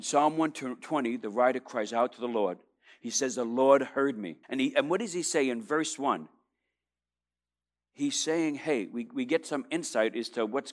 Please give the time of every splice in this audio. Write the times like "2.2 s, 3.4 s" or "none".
4.4 s